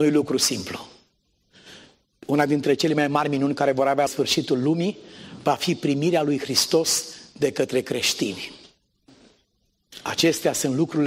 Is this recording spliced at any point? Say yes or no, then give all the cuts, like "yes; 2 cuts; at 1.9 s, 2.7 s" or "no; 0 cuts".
yes; 1 cut; at 4.1 s